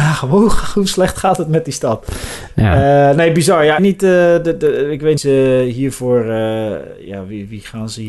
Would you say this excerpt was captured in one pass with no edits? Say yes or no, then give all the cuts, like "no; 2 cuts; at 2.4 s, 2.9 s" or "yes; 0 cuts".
no; 2 cuts; at 3.8 s, 5.2 s